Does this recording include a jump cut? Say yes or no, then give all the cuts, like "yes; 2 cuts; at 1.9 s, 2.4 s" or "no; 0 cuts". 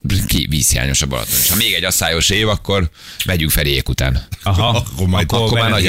no; 0 cuts